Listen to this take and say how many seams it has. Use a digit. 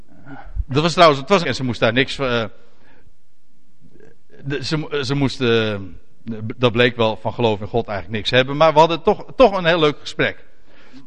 1